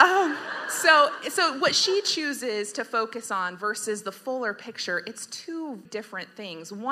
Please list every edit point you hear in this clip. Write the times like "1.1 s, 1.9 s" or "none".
5.9 s